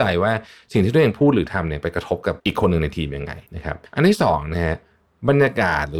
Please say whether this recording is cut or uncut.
cut